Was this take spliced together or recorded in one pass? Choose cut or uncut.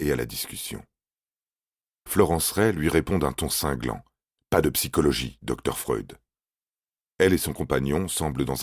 uncut